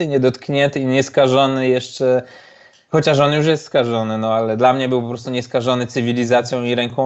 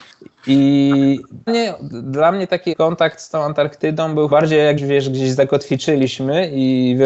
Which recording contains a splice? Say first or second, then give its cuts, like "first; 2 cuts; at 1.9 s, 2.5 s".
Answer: second; 4 cuts; at 1.5 s, 2.7 s, 4.3 s, 4.8 s